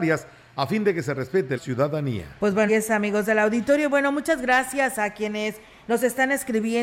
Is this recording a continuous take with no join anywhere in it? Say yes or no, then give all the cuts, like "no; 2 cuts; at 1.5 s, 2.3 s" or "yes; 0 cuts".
no; 2 cuts; at 1.6 s, 2.7 s